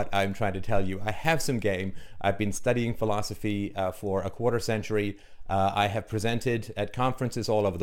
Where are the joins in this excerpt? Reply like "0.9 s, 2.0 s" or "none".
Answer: none